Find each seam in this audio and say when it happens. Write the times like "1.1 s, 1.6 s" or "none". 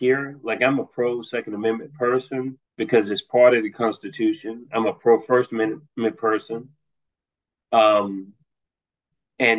2.7 s